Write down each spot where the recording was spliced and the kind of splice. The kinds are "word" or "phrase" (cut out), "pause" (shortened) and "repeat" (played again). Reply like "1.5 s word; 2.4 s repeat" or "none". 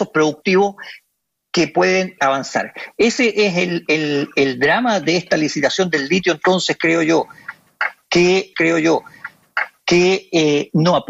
2.2 s word; 8.5 s repeat